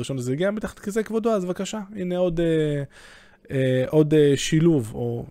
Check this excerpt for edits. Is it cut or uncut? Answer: uncut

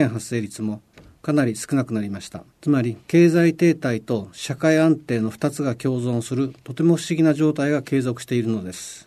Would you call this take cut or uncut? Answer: cut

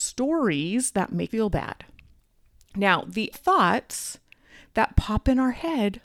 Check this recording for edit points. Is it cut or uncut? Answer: cut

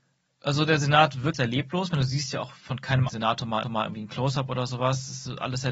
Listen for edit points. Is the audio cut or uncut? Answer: cut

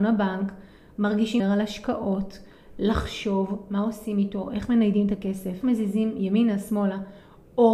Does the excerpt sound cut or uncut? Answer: cut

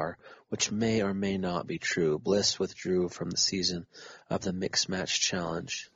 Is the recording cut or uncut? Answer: cut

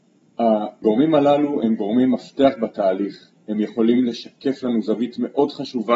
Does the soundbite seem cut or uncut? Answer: uncut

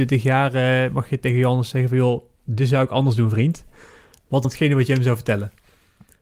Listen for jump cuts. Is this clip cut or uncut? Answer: cut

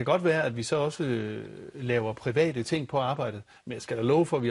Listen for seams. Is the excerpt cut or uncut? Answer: uncut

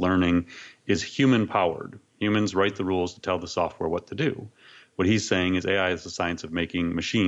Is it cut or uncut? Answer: uncut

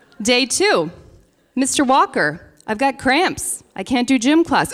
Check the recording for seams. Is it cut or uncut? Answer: uncut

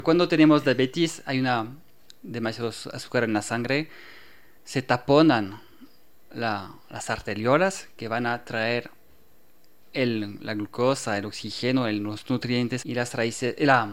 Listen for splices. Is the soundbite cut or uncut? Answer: cut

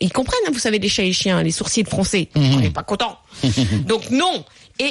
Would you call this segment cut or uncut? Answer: uncut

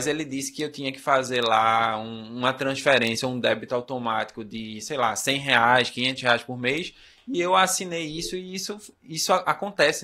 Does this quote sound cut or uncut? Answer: uncut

